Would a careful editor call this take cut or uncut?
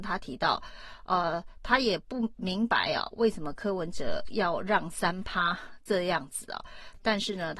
uncut